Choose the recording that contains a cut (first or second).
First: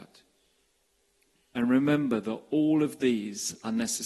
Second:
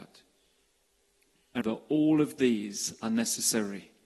second